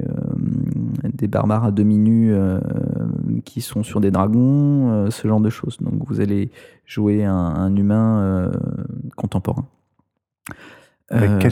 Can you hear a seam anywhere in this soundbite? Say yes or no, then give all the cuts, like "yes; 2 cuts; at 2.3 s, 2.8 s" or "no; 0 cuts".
no; 0 cuts